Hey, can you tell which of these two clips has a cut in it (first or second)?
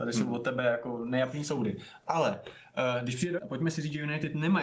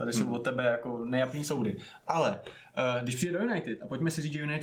first